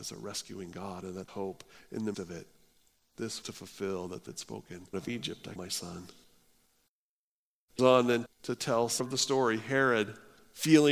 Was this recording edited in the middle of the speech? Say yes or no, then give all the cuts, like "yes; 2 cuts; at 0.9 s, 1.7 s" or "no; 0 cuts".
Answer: yes; 9 cuts; at 1.3 s, 2.1 s, 3.4 s, 4.3 s, 4.9 s, 5.6 s, 7.8 s, 8.3 s, 9.0 s